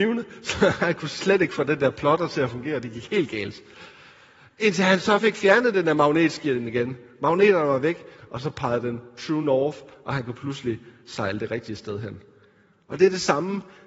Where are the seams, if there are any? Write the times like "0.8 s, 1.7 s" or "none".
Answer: none